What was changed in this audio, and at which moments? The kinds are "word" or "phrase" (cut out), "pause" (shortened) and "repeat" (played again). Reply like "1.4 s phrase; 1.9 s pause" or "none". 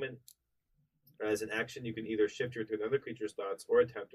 2.7 s word